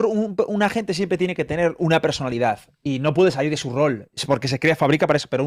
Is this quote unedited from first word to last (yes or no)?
yes